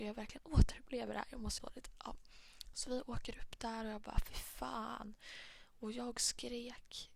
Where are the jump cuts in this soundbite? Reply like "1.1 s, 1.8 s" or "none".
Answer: 1.6 s